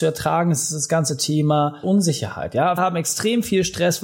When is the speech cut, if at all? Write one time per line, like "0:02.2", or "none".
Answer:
0:01.8
0:02.8